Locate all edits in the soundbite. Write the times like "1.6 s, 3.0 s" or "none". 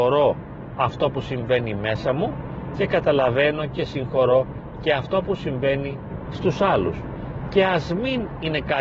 none